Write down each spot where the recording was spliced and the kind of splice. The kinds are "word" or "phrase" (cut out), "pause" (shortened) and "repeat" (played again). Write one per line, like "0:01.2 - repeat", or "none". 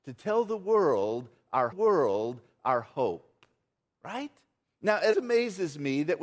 0:01.7 - repeat
0:04.6 - pause
0:05.1 - word